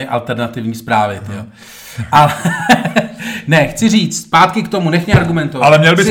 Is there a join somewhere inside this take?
no; 0 cuts

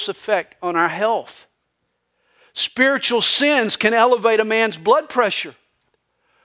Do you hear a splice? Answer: no; 0 cuts

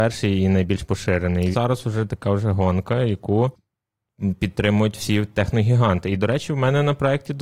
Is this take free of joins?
no; 2 cuts; at 1.5 s, 2.1 s

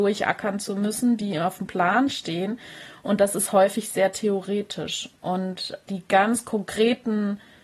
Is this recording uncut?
no; 1 cut; at 5.9 s

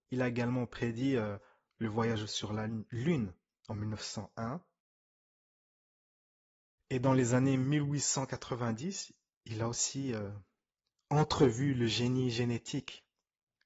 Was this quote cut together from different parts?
no; 0 cuts

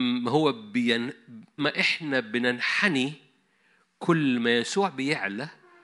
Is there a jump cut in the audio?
yes; 1 cut; at 1.6 s

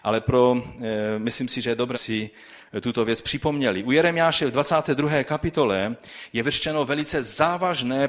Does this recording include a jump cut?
yes; 1 cut; at 1.9 s

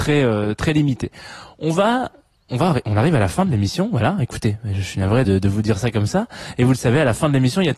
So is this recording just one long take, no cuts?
no; 1 cut; at 5.2 s

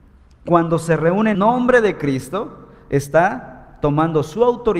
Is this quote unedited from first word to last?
no; 1 cut; at 1.3 s

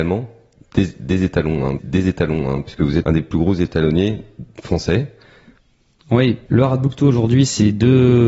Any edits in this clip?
yes; 3 cuts; at 1.8 s, 3.0 s, 6.5 s

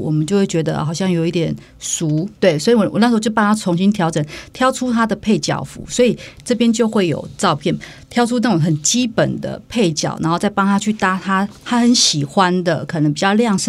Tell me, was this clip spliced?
yes; 1 cut; at 2.4 s

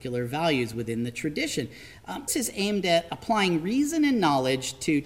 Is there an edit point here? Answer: yes; 1 cut; at 2.3 s

